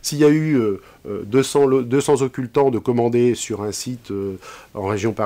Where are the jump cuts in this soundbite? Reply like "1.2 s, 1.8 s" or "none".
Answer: none